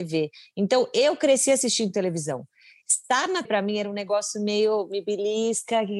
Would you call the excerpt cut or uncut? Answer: cut